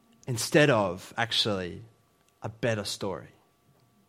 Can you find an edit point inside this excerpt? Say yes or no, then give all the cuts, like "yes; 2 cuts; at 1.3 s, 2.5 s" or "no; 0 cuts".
no; 0 cuts